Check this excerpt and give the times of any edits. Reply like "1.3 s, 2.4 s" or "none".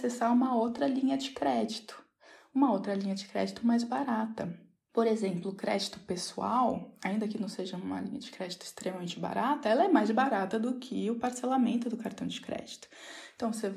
none

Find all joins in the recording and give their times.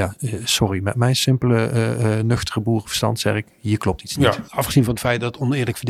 none

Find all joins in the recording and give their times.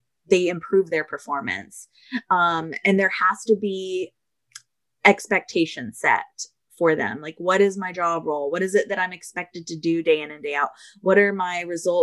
none

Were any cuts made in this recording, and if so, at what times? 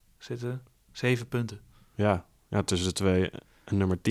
none

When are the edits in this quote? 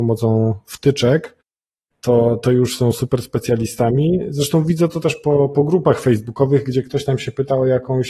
none

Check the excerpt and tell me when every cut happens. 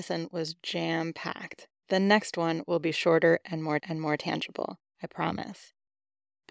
3.8 s

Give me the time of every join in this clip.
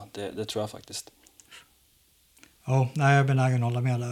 none

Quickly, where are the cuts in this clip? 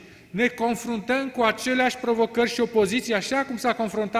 none

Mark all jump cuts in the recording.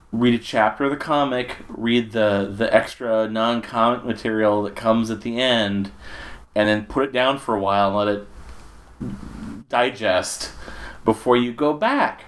none

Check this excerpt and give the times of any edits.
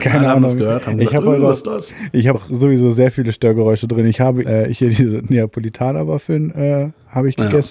2.3 s, 4.4 s

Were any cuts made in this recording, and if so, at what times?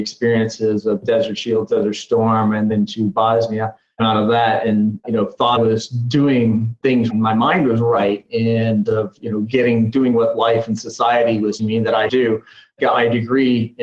2.7 s, 4.0 s, 5.6 s, 7.1 s, 8.9 s, 11.6 s, 12.1 s

